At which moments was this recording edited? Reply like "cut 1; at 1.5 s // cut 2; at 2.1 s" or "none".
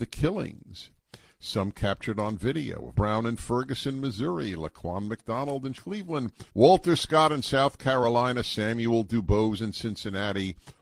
cut 1; at 2.9 s // cut 2; at 5.7 s // cut 3; at 6.5 s